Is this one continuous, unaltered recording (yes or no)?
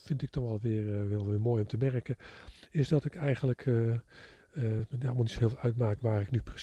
yes